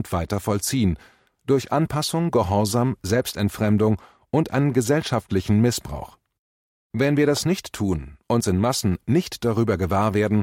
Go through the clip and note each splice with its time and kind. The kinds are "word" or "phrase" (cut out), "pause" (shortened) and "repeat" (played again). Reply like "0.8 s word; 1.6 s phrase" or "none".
none